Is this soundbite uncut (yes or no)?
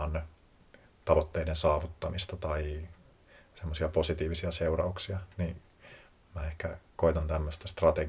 yes